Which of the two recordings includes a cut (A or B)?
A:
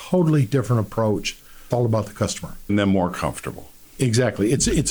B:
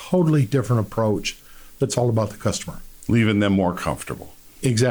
A